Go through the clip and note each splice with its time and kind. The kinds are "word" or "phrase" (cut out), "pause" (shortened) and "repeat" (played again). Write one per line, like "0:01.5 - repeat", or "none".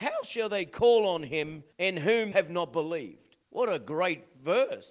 0:01.7 - pause
0:02.3 - word
0:03.4 - pause